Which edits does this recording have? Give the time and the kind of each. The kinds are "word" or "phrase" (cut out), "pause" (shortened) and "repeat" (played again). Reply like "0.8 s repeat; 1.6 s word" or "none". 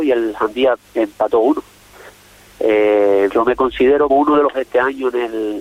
3.3 s word; 4.1 s word; 4.5 s word